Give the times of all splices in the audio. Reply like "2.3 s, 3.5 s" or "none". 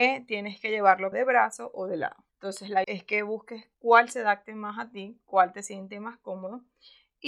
1.1 s, 2.3 s, 2.8 s, 3.7 s